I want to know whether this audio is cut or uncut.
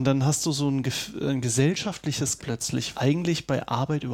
cut